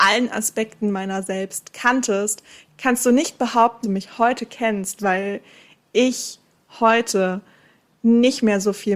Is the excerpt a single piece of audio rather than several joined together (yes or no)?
no